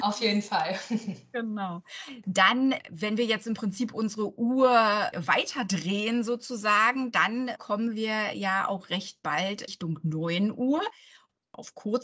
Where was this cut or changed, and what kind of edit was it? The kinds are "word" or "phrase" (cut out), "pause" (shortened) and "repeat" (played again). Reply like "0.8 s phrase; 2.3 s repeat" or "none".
9.7 s word

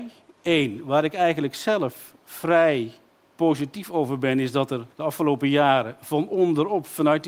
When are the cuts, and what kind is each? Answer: 3.1 s pause; 4.9 s pause

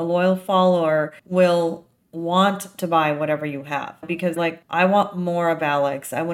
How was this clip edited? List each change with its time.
1.2 s pause; 4.4 s word

